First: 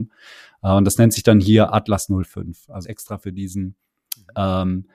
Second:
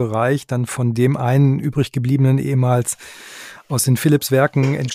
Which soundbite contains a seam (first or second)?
first